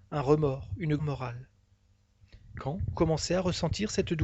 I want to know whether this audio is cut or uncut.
cut